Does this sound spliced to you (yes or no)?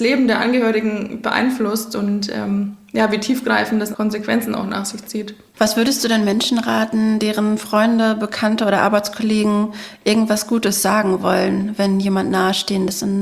yes